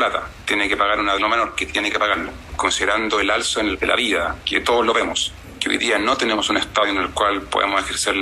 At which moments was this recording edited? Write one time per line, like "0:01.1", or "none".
0:01.2
0:03.8